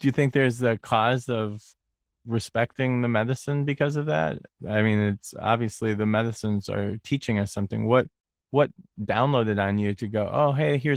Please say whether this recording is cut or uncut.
uncut